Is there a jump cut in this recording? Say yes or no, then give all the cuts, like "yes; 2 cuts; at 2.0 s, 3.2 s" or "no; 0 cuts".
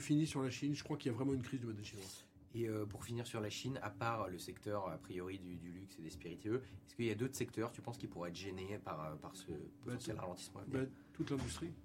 yes; 1 cut; at 9.2 s